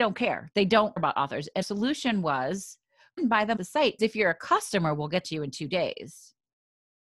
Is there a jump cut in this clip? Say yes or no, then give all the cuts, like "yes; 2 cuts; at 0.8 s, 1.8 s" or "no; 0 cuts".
yes; 6 cuts; at 1.0 s, 1.6 s, 3.2 s, 3.6 s, 4.0 s, 5.2 s